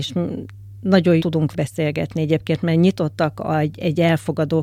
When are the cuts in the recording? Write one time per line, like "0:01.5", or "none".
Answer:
0:01.2
0:01.5